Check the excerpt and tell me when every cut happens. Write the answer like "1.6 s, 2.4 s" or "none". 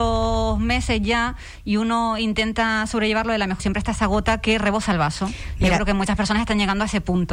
3.6 s